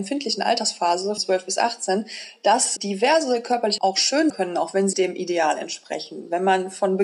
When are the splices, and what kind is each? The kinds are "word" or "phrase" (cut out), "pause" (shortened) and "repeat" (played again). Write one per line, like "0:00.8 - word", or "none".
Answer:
0:01.2 - word
0:02.8 - word
0:03.8 - word
0:04.3 - word
0:04.9 - word